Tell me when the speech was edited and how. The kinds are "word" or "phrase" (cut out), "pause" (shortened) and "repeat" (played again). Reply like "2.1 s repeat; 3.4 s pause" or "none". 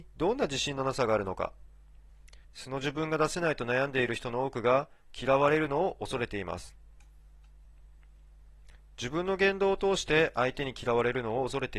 2.4 s pause